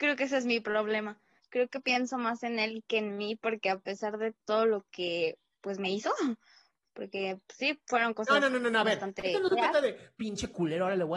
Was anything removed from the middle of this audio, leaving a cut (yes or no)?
no